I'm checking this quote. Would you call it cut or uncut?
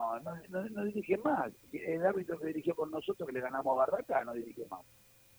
uncut